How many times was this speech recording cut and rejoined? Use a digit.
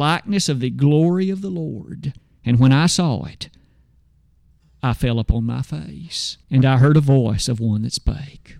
2